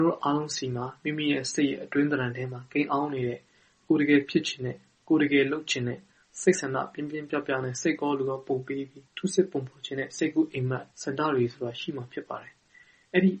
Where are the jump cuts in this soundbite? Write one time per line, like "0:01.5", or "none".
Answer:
0:09.1
0:10.9